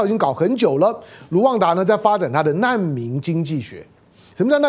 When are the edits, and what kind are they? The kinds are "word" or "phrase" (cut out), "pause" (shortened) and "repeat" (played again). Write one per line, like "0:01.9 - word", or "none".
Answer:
none